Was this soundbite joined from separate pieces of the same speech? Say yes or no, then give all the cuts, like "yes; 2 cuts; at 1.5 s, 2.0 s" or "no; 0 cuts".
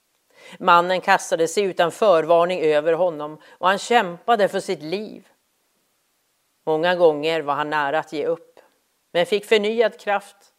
no; 0 cuts